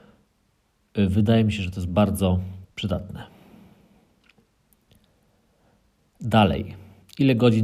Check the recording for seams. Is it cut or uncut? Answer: cut